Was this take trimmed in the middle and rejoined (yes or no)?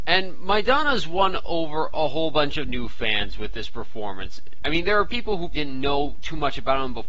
yes